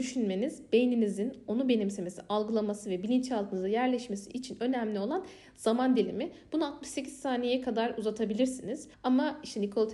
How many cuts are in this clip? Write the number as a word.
one